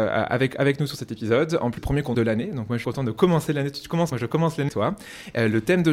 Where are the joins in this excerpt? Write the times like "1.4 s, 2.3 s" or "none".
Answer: 1.8 s, 2.1 s, 2.8 s, 4.1 s, 4.7 s